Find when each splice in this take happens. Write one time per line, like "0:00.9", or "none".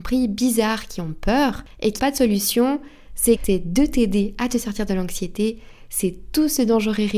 0:02.0
0:03.3